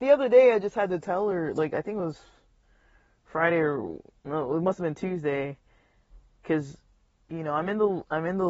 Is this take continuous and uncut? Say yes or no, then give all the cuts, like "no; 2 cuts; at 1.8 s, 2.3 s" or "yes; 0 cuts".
yes; 0 cuts